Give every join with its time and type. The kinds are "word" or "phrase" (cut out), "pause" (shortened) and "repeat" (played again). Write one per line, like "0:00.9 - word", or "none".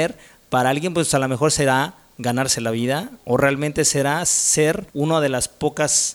0:04.9 - pause